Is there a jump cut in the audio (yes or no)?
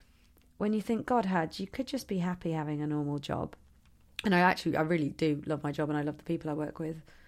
no